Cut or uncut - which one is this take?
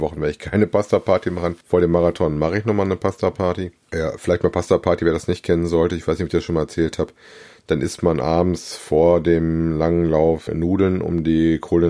cut